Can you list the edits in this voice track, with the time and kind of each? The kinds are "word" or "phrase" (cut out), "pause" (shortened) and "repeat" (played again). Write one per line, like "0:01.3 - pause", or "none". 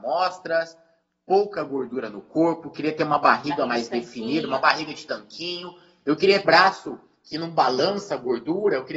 0:06.4 - word